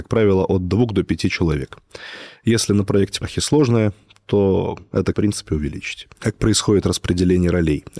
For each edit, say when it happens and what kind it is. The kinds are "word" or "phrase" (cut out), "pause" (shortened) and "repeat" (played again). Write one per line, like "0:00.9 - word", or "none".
0:03.2 - phrase
0:05.1 - phrase